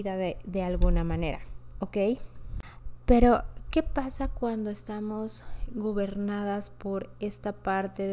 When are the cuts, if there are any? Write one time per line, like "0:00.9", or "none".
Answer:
none